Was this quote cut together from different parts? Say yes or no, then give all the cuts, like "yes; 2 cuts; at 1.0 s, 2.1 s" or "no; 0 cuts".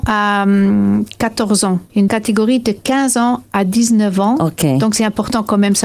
yes; 1 cut; at 2.1 s